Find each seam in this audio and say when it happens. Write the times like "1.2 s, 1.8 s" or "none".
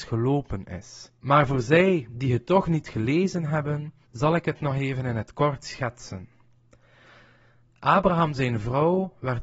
1.2 s, 4.0 s